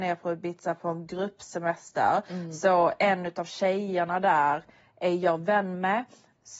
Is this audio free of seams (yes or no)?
yes